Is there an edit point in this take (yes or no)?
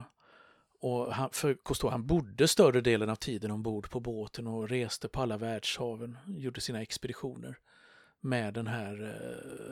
no